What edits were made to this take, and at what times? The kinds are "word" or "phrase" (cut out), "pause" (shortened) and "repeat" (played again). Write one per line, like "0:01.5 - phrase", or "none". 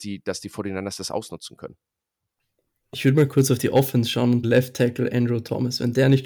0:04.4 - phrase